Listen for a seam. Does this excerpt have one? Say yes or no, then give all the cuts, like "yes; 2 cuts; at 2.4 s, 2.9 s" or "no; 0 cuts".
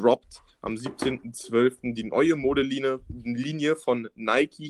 no; 0 cuts